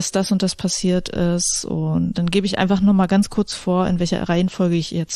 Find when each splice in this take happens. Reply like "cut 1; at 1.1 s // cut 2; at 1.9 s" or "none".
cut 1; at 2.1 s